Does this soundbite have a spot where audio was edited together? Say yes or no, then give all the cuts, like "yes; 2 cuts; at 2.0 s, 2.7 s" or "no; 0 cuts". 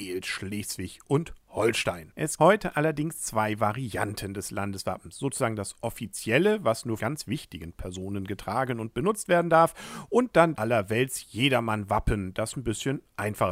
yes; 3 cuts; at 2.4 s, 7.0 s, 10.5 s